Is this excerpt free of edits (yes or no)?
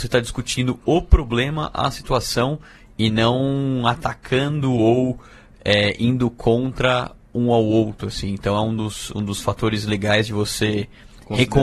yes